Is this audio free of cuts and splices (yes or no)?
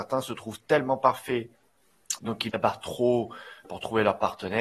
no